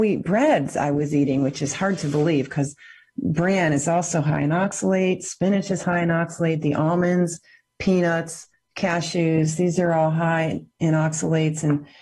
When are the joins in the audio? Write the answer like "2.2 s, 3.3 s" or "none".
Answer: none